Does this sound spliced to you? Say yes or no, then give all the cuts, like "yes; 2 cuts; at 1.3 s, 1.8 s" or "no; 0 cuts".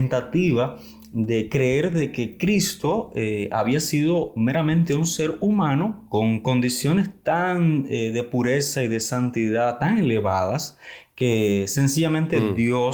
yes; 1 cut; at 6.1 s